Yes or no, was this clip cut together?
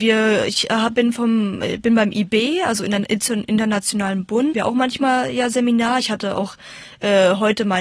yes